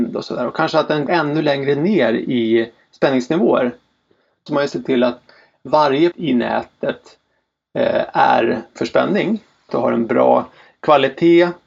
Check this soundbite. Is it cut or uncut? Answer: cut